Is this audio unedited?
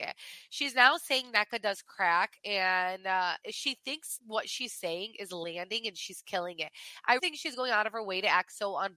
no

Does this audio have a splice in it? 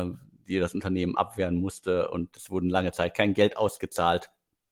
no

